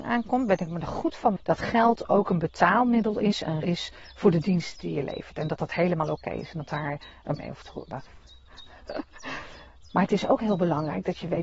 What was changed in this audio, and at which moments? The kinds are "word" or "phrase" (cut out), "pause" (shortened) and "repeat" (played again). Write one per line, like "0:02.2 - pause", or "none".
0:01.4 - word
0:03.6 - word
0:06.7 - word
0:07.4 - word